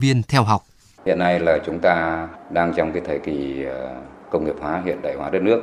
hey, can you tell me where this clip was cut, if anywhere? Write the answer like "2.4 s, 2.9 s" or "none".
none